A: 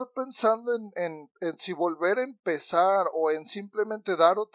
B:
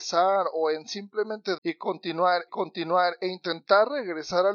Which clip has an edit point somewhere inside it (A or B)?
B